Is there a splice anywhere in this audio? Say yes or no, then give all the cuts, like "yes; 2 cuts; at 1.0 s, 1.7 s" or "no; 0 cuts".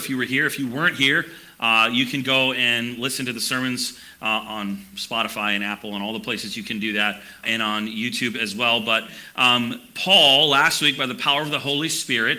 yes; 1 cut; at 7.4 s